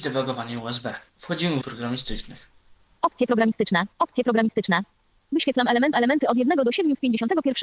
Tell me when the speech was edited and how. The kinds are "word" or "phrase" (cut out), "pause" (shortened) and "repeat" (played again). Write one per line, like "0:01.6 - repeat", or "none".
0:01.1 - pause
0:01.6 - phrase
0:03.9 - pause
0:05.9 - repeat